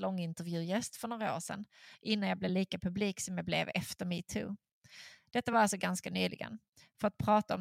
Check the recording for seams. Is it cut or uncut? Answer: uncut